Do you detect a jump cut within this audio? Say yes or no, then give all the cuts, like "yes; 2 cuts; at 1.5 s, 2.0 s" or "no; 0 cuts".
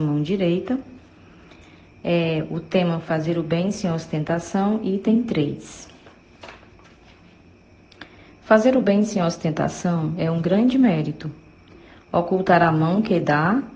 no; 0 cuts